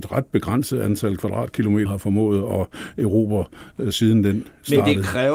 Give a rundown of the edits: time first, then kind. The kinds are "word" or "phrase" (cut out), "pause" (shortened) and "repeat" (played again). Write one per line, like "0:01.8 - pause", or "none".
0:01.9 - word